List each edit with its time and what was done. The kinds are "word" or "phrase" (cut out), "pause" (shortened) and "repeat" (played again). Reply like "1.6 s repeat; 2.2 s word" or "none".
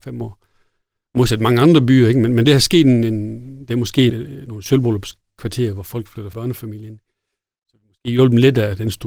2.5 s phrase; 4.1 s word; 6.3 s phrase